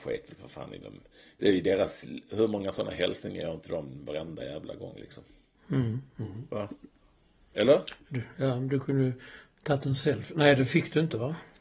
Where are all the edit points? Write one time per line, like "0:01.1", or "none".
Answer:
none